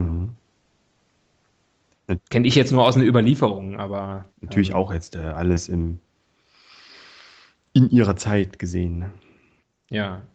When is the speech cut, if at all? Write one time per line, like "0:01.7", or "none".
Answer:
0:04.3